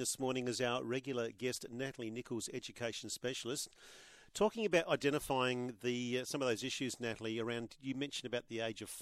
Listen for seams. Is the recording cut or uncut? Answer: uncut